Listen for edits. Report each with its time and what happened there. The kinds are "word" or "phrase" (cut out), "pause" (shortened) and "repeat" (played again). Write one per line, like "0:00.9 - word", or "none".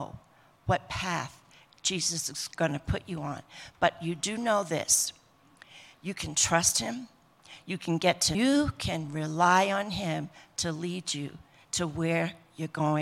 0:08.3 - phrase